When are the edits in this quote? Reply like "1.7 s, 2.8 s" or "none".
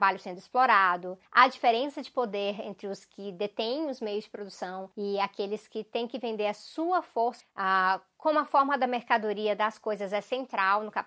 1.3 s, 4.9 s, 7.4 s